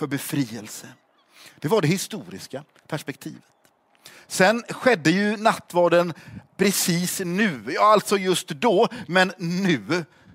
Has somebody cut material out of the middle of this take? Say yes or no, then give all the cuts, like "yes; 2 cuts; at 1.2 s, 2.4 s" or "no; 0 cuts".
no; 0 cuts